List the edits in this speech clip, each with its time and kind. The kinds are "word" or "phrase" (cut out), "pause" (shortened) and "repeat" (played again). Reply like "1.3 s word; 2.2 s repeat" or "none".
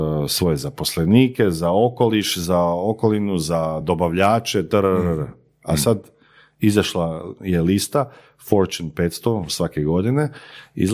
none